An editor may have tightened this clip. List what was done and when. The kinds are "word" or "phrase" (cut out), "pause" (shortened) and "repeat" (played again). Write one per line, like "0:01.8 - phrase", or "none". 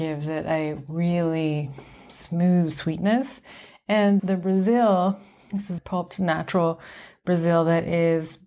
0:04.2 - word
0:05.8 - word